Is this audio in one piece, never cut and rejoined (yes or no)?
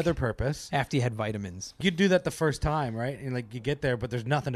no